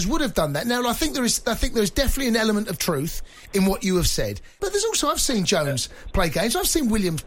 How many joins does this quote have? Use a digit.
0